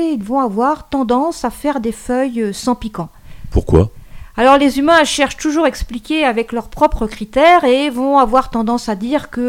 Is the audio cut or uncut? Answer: uncut